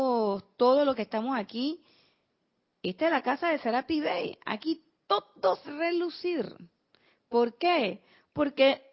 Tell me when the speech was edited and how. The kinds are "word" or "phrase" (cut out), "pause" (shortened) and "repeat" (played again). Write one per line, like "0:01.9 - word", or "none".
0:05.6 - phrase